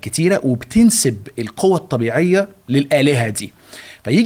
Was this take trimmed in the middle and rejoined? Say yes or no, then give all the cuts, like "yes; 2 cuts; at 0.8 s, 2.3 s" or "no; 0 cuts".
no; 0 cuts